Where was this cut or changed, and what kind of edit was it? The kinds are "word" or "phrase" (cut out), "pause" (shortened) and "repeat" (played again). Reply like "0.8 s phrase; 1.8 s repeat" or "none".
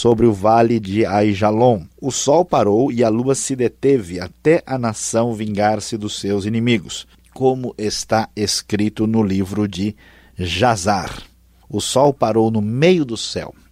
1.9 s pause; 7.1 s pause